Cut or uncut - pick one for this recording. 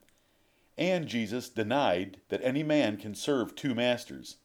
cut